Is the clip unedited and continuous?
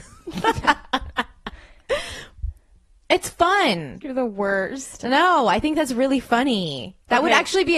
yes; 0 cuts

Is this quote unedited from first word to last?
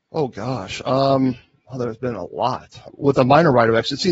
no; 1 cut; at 2.9 s

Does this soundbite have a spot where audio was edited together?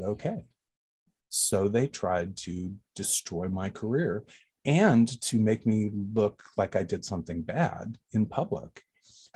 no; 0 cuts

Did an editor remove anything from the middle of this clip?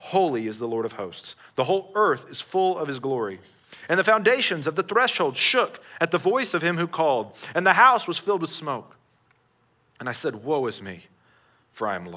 no; 0 cuts

